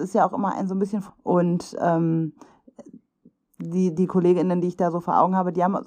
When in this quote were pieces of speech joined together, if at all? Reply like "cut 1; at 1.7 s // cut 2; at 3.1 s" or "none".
cut 1; at 1.1 s